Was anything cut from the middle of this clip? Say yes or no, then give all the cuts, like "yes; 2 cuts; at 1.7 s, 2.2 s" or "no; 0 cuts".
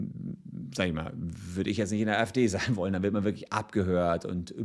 no; 0 cuts